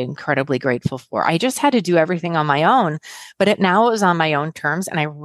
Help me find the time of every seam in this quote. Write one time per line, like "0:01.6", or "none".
none

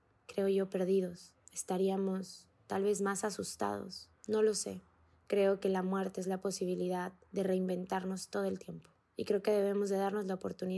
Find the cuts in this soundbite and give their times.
none

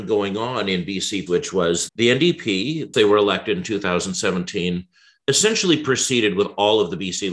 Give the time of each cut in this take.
0:01.3
0:01.9
0:02.9

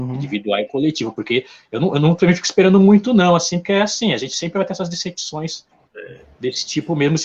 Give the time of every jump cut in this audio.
none

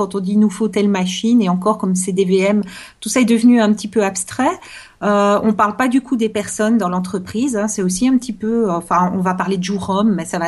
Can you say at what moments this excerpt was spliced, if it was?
none

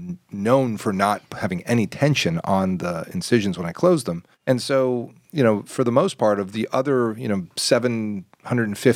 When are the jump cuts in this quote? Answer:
0:04.3

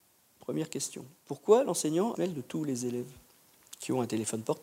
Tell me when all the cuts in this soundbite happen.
0:02.1

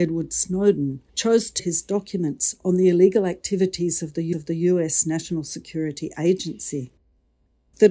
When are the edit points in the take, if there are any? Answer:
0:01.1
0:01.6
0:04.3

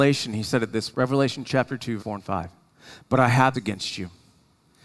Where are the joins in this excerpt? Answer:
0:00.9
0:02.0
0:03.5

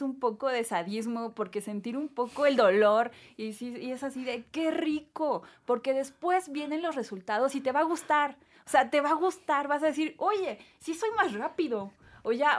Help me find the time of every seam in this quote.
none

